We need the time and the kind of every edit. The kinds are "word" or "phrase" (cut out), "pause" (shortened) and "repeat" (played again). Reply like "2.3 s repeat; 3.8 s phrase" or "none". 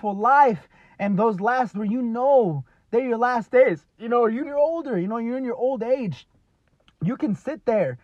1.7 s word; 4.4 s word